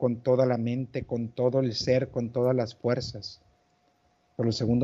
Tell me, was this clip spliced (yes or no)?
no